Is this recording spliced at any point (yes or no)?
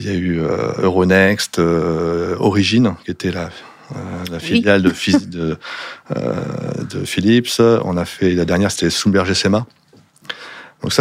no